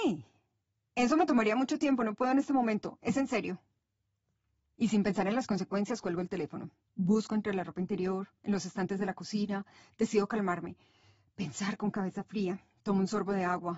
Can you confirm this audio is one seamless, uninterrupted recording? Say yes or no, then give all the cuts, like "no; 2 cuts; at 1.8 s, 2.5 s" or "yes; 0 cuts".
yes; 0 cuts